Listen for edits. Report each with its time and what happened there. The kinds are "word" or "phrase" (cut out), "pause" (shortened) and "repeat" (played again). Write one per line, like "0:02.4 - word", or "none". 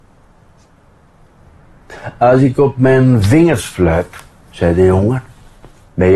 none